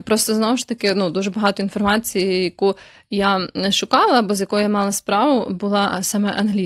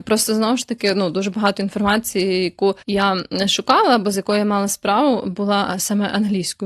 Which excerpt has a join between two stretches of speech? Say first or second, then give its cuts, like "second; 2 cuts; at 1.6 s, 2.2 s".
second; 1 cut; at 2.8 s